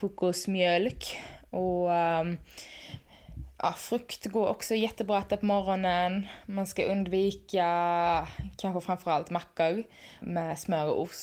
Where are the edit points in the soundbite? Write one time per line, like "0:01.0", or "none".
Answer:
0:10.2